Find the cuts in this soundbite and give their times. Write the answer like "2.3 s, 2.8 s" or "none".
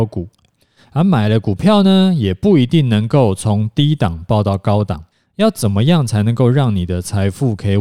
5.1 s